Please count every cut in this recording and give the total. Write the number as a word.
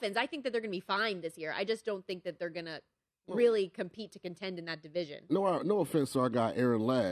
zero